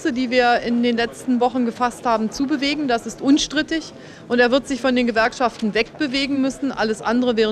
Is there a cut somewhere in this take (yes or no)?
no